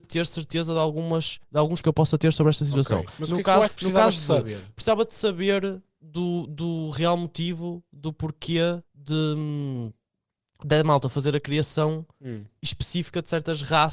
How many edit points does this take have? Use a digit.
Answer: 4